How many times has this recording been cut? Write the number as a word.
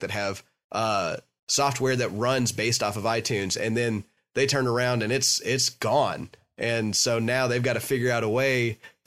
zero